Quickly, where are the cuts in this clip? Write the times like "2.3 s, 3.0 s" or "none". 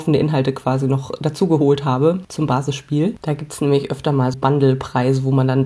4.3 s